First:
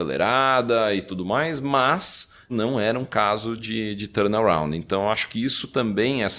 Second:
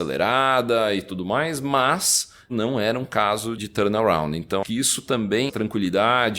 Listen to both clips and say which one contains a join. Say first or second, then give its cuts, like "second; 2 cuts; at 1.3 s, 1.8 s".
second; 3 cuts; at 3.6 s, 4.6 s, 5.5 s